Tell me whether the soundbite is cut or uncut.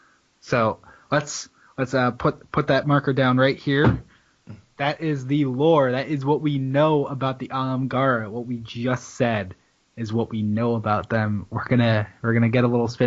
uncut